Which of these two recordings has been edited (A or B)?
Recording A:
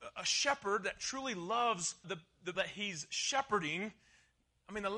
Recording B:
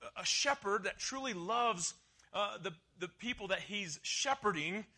A